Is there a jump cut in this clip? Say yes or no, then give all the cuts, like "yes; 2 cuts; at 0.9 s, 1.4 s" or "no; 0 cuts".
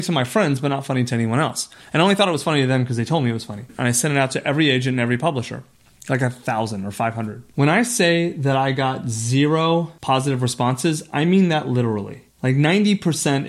no; 0 cuts